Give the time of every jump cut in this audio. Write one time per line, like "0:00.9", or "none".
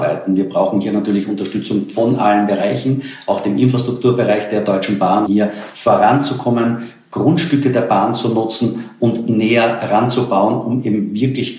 0:05.3